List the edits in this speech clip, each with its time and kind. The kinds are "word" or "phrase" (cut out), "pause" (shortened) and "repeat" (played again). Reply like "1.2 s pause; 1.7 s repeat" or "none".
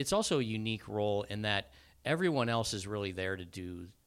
none